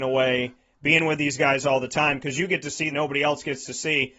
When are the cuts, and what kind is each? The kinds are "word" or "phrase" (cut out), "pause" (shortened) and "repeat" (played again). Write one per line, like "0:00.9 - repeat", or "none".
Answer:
0:02.9 - phrase